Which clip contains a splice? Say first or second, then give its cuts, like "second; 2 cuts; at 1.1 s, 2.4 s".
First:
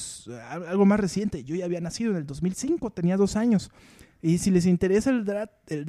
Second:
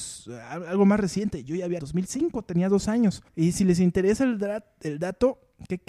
second; 2 cuts; at 1.8 s, 3.3 s